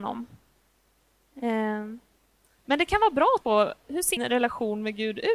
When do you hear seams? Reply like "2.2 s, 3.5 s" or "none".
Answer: 3.4 s, 4.2 s